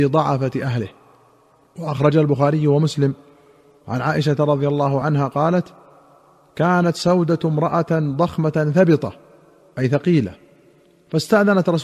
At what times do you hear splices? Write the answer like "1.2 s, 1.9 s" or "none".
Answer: none